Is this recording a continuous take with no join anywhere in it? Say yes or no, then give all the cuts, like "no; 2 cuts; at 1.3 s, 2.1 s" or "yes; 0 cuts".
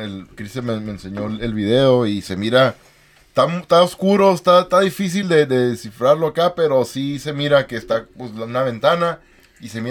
yes; 0 cuts